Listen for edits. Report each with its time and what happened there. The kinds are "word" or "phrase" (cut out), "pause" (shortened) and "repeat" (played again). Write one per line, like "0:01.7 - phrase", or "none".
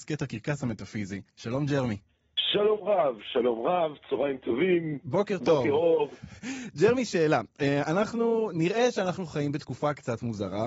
0:01.3 - pause